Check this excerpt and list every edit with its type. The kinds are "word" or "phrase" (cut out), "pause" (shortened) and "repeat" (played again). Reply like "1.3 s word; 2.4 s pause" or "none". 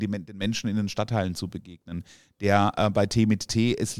none